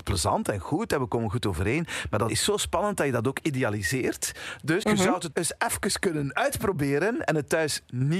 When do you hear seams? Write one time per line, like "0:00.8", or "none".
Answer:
0:02.3
0:04.8
0:05.3